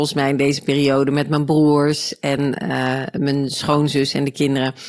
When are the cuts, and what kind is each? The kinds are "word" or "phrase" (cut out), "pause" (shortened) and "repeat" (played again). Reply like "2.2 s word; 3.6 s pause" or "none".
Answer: none